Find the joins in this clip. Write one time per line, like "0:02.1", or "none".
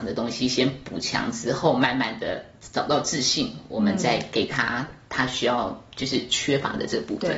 none

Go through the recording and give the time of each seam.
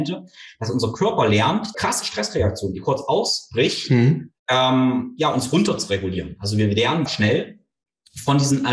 0:01.7
0:04.4
0:07.1

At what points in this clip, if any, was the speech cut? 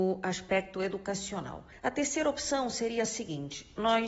none

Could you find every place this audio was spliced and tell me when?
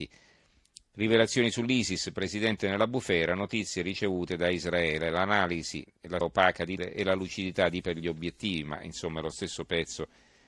0:05.9
0:06.2
0:06.8
0:07.8

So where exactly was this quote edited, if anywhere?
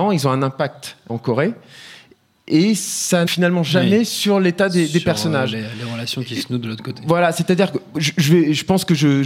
0:01.1
0:03.3

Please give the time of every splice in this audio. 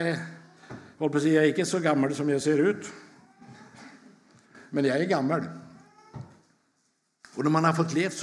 none

